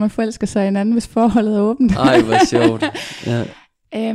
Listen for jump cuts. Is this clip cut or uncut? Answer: uncut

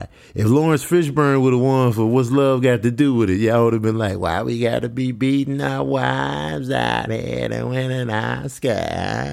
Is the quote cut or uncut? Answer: uncut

